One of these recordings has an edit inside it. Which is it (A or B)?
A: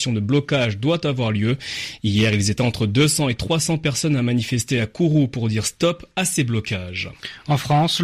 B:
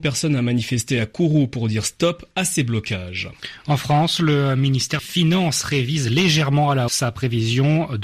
B